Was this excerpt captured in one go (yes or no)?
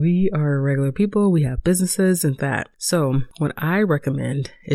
no